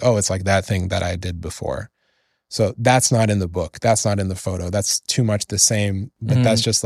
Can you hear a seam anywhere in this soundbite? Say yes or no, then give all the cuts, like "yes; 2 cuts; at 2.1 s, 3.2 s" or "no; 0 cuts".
no; 0 cuts